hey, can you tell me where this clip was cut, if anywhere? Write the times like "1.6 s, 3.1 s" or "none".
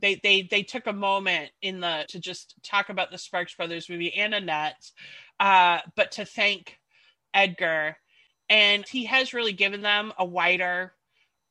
2.1 s, 8.9 s